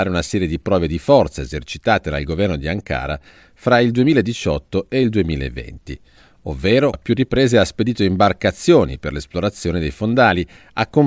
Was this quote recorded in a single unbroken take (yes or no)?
no